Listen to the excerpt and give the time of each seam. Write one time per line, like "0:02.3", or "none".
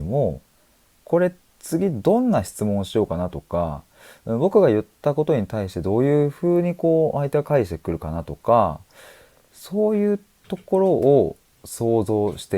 none

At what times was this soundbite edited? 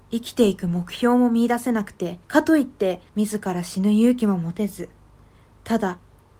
0:02.2
0:03.1

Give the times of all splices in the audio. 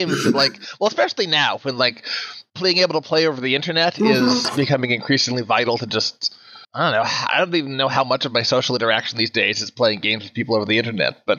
0:02.5
0:06.6

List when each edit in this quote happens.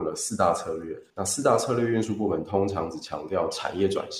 0:01.1

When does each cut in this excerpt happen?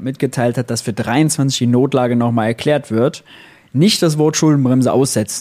none

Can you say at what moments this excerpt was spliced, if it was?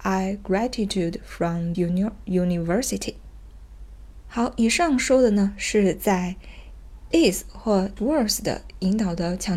0:01.7
0:07.1
0:08.0

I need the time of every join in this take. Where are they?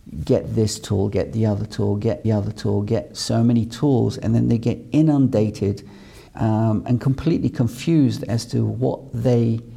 0:02.2
0:06.3

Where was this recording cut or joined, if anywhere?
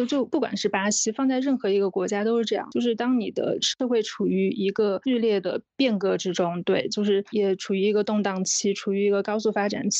none

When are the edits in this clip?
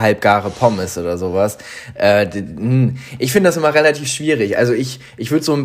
none

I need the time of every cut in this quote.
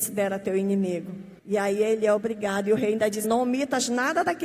0:01.4
0:03.2

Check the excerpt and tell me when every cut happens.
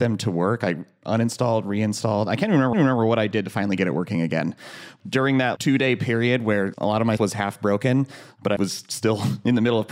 0:02.7
0:05.6
0:07.2
0:08.6

